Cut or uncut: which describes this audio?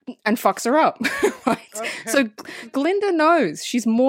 cut